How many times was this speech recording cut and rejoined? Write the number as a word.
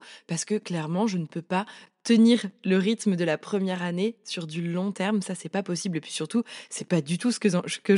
zero